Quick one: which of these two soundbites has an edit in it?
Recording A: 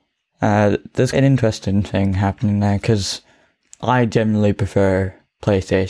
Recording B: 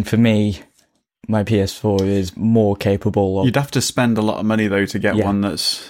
A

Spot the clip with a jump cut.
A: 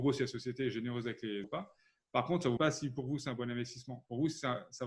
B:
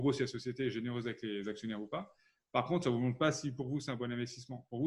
A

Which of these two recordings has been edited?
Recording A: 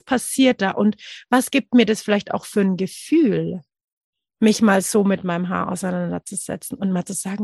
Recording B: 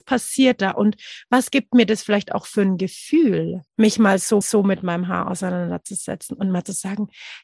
B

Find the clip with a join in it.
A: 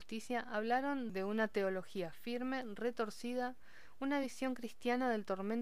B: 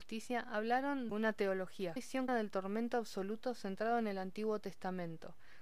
B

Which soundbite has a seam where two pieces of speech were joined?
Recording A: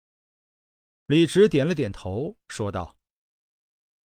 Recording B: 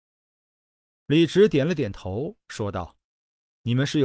B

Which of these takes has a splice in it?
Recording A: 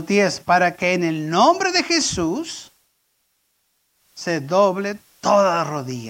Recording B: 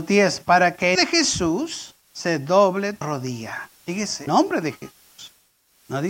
B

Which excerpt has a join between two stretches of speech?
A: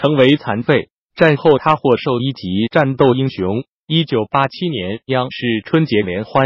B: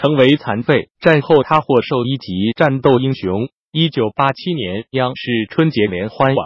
B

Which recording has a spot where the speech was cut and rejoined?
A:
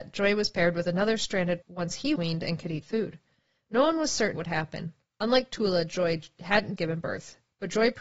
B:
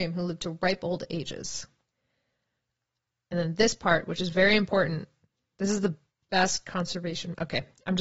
A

